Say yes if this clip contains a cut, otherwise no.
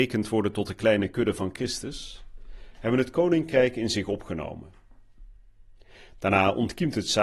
no